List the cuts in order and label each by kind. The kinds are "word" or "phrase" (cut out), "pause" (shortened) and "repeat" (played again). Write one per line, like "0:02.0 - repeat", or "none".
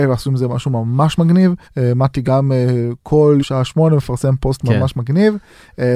0:01.6 - pause
0:03.4 - word